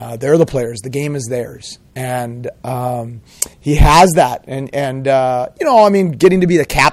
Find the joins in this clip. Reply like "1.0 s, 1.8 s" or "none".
3.5 s